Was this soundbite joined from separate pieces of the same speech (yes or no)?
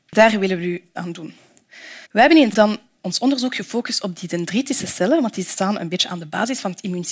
yes